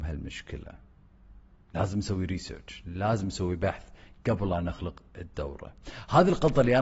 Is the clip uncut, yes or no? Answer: yes